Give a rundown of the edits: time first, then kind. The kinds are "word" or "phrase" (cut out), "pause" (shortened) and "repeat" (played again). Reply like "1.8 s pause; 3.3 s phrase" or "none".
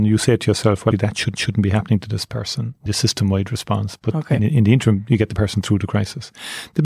0.9 s word; 1.3 s repeat; 2.9 s word; 4.4 s word